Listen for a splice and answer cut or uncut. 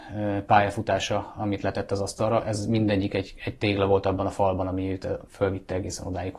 cut